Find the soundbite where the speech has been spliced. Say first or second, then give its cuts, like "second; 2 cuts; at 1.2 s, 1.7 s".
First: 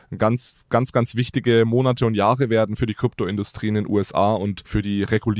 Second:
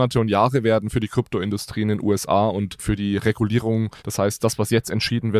second; 1 cut; at 4.0 s